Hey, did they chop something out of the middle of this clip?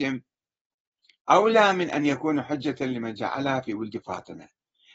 no; 0 cuts

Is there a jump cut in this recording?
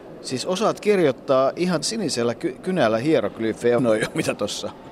yes; 2 cuts; at 1.8 s, 3.8 s

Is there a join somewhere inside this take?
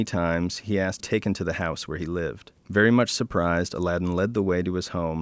yes; 2 cuts; at 1.0 s, 2.6 s

